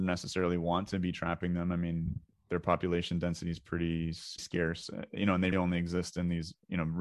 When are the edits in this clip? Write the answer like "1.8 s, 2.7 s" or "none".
4.4 s, 5.5 s